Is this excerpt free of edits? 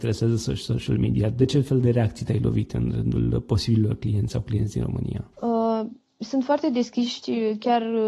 no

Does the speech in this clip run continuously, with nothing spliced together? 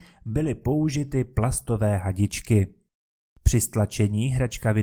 yes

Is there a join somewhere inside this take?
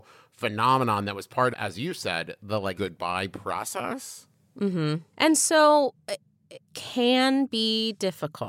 yes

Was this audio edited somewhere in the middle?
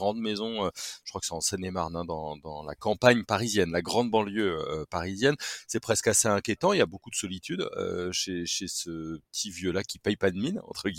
no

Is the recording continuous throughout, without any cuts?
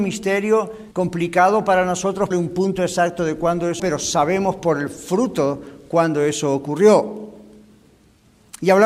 no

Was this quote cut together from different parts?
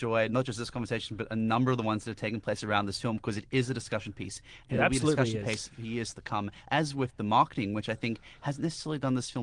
no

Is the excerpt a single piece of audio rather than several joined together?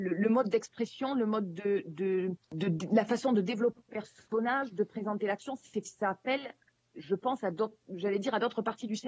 no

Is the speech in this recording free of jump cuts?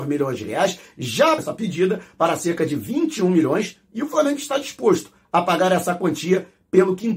no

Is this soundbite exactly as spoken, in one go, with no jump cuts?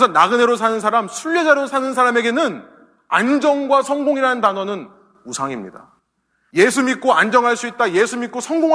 yes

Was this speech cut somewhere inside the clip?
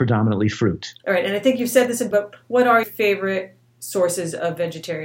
yes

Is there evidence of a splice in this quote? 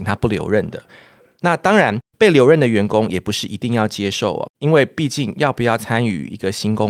yes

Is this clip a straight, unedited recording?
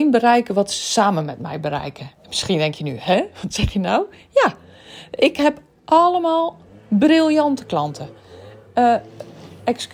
yes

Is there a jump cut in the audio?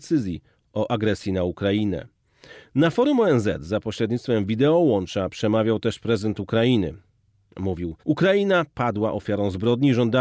yes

